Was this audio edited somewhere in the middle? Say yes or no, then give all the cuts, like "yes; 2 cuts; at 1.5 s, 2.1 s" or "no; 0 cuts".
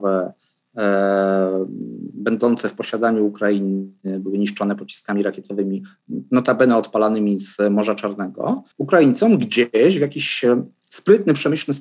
yes; 1 cut; at 8.7 s